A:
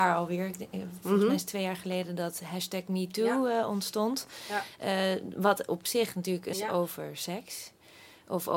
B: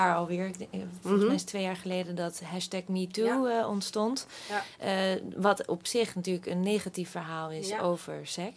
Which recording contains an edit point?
A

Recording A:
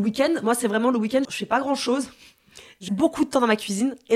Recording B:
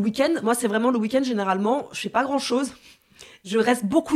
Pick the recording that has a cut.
A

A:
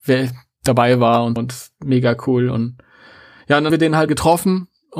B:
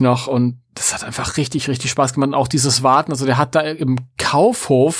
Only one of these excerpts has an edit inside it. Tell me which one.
A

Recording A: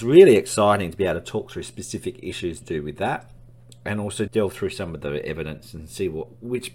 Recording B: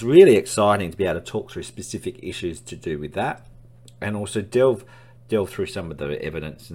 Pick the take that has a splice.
A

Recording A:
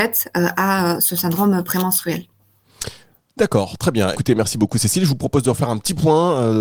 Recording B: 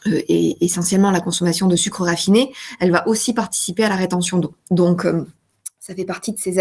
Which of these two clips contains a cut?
A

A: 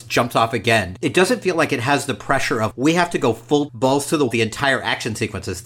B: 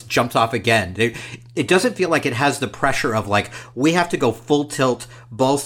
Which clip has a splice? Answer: A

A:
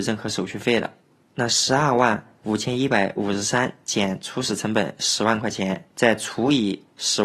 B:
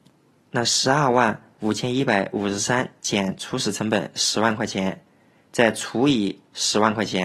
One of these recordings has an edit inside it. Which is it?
A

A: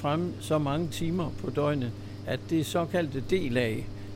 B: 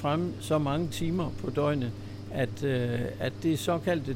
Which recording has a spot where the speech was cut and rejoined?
A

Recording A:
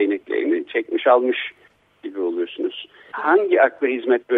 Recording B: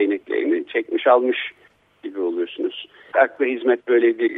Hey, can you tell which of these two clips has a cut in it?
B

